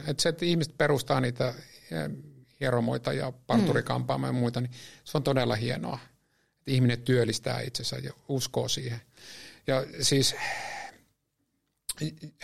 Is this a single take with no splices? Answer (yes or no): yes